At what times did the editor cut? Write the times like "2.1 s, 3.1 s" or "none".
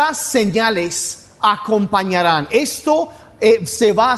none